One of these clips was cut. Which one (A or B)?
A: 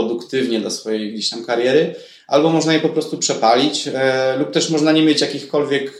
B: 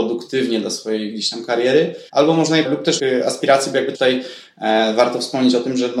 B